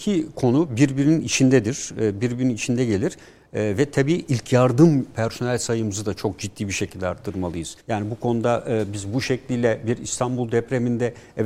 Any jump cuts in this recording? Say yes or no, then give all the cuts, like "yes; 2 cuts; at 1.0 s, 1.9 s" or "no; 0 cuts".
yes; 1 cut; at 7.8 s